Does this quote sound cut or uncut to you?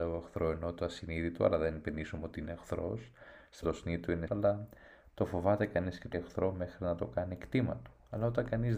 cut